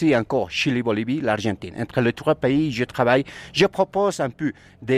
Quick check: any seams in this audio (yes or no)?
no